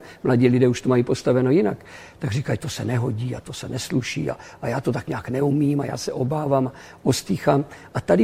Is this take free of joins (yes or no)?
yes